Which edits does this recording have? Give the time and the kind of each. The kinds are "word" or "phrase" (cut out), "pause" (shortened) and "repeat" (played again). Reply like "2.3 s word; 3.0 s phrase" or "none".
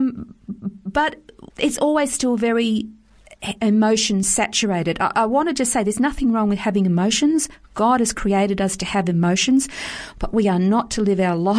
1.5 s pause